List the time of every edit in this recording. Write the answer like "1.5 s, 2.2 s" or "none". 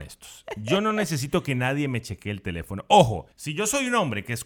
3.3 s